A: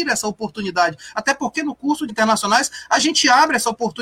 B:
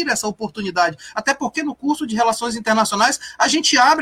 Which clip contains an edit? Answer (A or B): A